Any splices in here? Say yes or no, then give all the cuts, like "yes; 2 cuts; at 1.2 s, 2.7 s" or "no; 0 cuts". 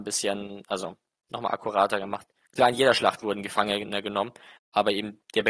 no; 0 cuts